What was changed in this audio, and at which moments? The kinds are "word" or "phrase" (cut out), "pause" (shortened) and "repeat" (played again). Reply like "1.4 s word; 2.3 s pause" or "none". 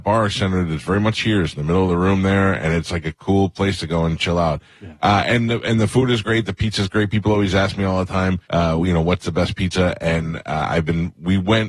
1.1 s word; 8.4 s pause